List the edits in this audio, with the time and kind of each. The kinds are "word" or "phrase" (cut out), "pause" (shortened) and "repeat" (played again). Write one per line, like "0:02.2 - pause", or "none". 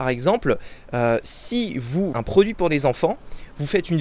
0:02.1 - word